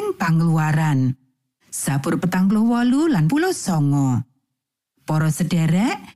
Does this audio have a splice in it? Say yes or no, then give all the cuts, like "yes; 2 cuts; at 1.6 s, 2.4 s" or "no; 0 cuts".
yes; 2 cuts; at 2.2 s, 3.3 s